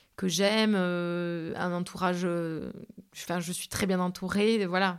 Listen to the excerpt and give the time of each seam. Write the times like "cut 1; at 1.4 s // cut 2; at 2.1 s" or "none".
cut 1; at 3.1 s